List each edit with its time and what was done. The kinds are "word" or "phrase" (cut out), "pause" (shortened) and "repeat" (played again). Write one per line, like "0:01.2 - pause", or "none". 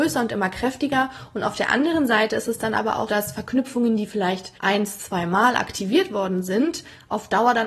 0:03.1 - word
0:04.6 - pause